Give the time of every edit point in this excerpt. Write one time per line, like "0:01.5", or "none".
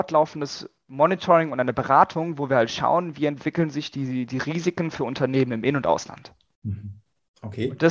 none